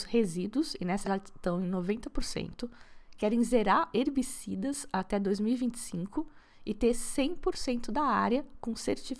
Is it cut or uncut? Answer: cut